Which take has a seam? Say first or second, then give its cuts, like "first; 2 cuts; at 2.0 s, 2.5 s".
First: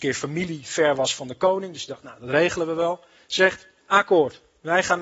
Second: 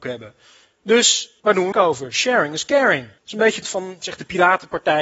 second; 4 cuts; at 1.4 s, 1.7 s, 3.2 s, 3.6 s